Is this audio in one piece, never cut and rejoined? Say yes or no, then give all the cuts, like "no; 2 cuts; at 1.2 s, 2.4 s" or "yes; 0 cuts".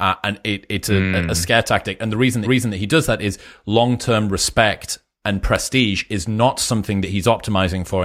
no; 1 cut; at 2.4 s